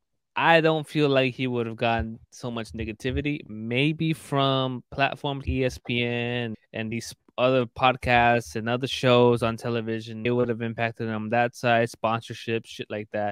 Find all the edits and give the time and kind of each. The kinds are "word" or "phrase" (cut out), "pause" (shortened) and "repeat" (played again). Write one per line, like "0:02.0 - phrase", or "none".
0:05.5 - word
0:06.5 - word
0:10.2 - word